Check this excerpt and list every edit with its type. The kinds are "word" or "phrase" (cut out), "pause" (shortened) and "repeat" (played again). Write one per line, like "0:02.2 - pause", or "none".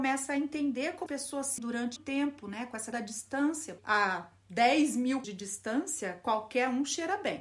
0:01.1 - word
0:01.6 - word
0:02.0 - word
0:02.9 - word
0:05.2 - word